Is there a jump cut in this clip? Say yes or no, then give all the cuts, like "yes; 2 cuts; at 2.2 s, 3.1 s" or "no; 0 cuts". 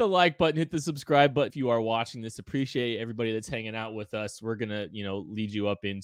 yes; 1 cut; at 1.5 s